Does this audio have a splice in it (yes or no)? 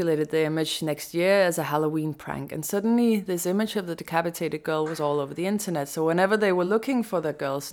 no